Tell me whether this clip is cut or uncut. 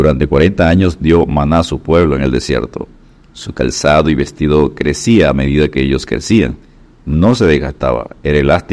uncut